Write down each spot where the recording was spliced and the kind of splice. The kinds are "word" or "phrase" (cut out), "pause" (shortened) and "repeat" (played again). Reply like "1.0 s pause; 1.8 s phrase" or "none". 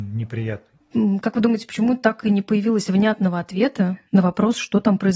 4.1 s pause